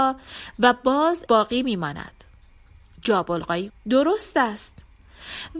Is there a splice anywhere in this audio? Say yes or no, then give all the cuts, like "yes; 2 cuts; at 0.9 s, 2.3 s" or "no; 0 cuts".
yes; 2 cuts; at 1.3 s, 3.7 s